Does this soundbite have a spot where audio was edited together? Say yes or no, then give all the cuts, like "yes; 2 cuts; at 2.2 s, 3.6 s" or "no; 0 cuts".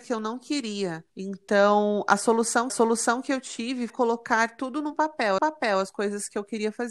yes; 4 cuts; at 1.1 s, 2.7 s, 3.9 s, 5.4 s